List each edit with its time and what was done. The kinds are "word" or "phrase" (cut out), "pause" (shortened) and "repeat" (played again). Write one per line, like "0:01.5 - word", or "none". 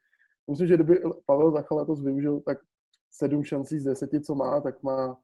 none